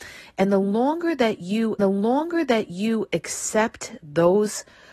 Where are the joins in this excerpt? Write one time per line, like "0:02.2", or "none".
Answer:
0:01.8